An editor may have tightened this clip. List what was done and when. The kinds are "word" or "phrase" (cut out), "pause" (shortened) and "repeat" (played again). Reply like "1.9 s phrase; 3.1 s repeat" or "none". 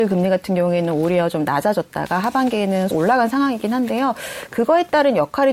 2.9 s word

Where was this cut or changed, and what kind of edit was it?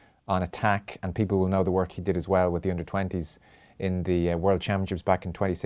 none

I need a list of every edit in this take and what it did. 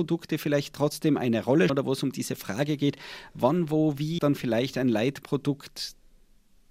1.7 s word; 4.2 s word

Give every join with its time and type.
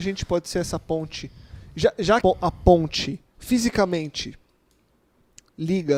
2.2 s word; 3.3 s pause

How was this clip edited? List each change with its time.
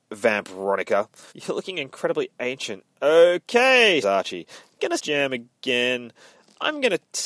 1.3 s pause; 4.0 s word; 5.0 s phrase

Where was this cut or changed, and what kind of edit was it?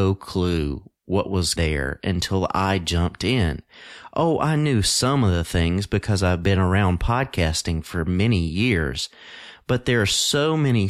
1.6 s phrase

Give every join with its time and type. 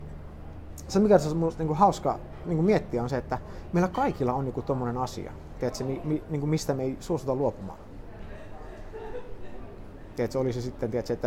none

